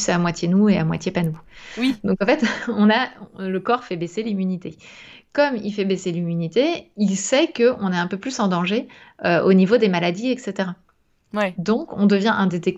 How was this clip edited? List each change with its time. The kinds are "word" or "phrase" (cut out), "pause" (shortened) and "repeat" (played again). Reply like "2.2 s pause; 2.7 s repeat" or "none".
none